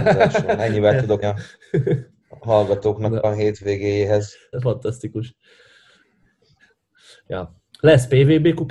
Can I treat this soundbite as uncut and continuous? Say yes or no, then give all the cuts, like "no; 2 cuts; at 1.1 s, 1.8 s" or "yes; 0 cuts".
no; 2 cuts; at 1.2 s, 4.5 s